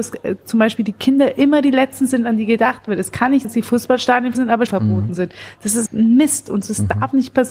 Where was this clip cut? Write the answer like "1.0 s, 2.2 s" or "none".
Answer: 3.4 s, 4.3 s, 4.7 s, 5.9 s